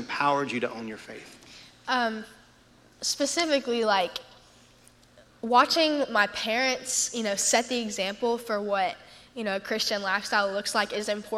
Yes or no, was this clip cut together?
no